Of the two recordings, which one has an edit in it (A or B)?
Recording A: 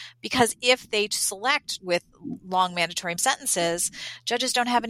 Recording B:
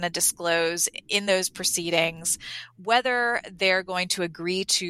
A